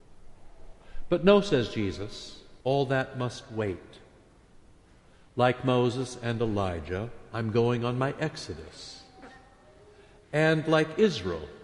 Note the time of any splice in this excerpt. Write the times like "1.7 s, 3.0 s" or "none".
2.6 s